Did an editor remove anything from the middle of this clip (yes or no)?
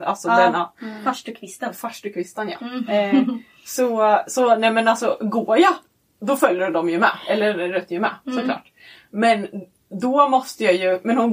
no